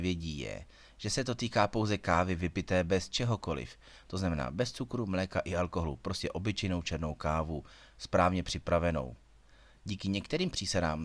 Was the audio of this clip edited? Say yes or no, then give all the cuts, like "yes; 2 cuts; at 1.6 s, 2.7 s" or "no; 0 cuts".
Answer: no; 0 cuts